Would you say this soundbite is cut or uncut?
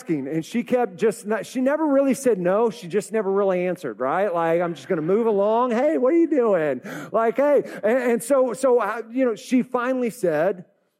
uncut